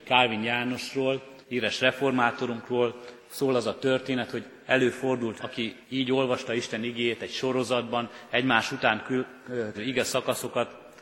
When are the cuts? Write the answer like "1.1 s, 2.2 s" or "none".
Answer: 1.4 s, 3.2 s, 5.4 s, 5.8 s, 9.7 s